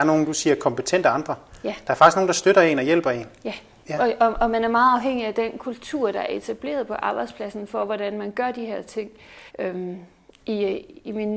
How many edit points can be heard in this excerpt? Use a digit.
1